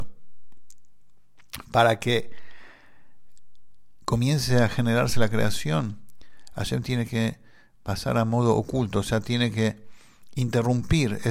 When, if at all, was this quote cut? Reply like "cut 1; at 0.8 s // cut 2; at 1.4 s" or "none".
none